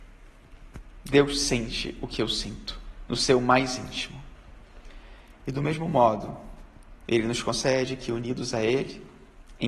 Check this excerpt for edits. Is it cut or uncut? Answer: uncut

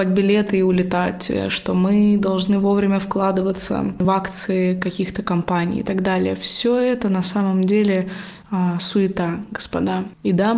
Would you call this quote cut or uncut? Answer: uncut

